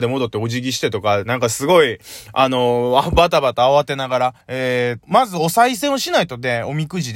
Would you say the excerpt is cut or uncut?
cut